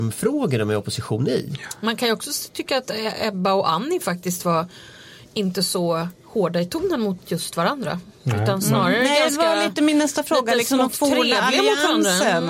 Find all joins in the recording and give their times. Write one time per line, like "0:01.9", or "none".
none

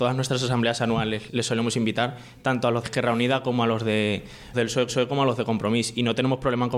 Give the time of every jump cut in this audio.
0:01.3
0:02.8
0:04.5
0:04.9

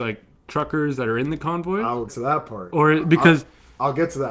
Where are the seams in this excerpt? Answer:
0:02.1

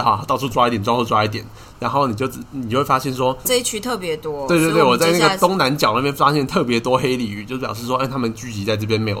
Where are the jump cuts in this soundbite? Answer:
0:03.4

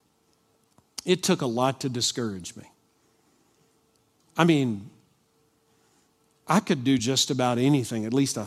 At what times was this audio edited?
none

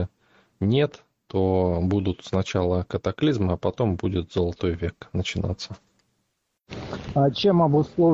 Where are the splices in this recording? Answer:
none

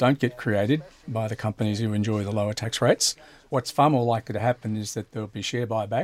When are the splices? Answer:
none

